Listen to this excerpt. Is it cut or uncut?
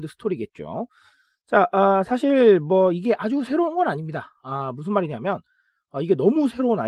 uncut